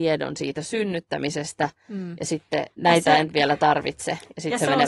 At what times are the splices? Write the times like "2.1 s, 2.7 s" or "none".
2.7 s